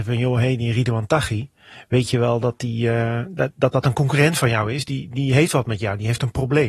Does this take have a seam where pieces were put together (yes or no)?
no